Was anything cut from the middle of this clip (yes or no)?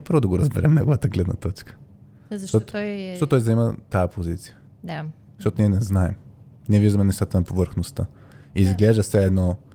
no